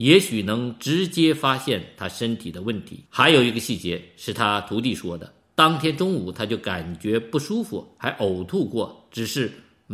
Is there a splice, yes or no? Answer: yes